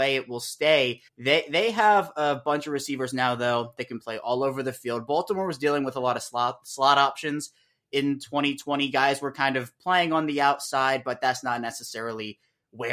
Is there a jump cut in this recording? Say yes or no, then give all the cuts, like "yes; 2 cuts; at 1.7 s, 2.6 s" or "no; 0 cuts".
yes; 1 cut; at 1.1 s